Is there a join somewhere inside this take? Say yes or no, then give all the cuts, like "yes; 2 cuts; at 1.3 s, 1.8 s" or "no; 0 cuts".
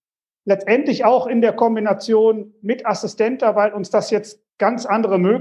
no; 0 cuts